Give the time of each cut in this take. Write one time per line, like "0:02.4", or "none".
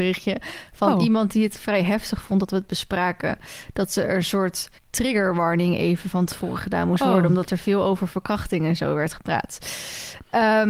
0:04.8